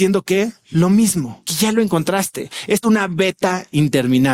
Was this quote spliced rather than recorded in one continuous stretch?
yes; 2 cuts; at 1.5 s, 2.8 s

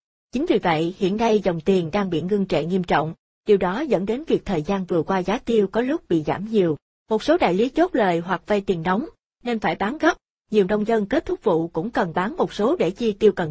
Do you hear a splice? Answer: no; 0 cuts

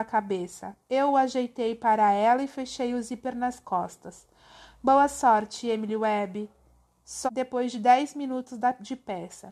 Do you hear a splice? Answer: yes; 1 cut; at 7.3 s

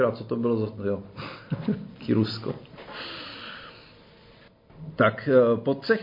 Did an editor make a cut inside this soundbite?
no; 0 cuts

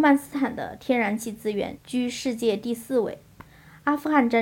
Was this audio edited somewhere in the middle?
no; 0 cuts

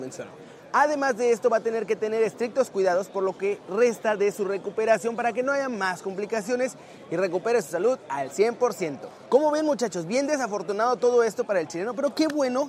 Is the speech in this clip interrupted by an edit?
no; 0 cuts

